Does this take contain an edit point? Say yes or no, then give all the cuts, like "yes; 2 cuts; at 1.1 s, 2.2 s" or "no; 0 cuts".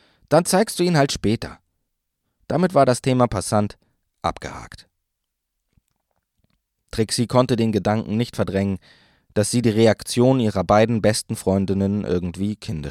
no; 0 cuts